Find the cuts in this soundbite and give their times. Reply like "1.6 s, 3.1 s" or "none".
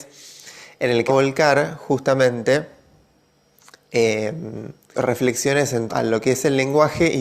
1.1 s, 4.9 s, 5.9 s